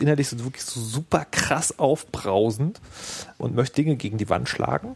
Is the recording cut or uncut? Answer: cut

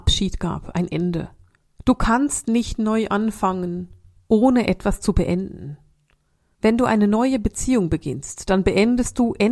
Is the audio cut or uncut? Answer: uncut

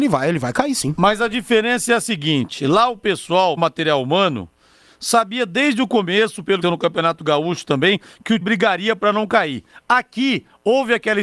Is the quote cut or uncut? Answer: cut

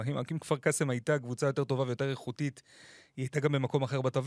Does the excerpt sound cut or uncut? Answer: uncut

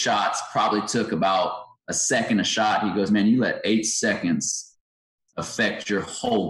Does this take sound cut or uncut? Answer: uncut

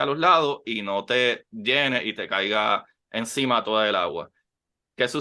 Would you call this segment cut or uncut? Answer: uncut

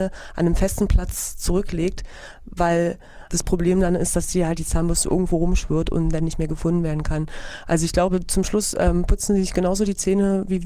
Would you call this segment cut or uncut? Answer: uncut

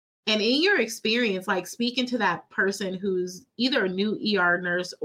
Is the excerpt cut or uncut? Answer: uncut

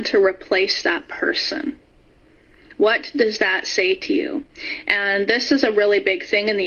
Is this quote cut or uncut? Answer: uncut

